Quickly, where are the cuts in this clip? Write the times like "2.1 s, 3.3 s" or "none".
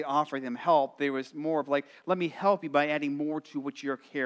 none